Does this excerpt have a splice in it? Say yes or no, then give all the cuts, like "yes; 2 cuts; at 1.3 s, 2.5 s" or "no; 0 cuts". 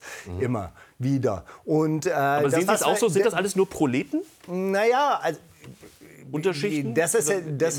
no; 0 cuts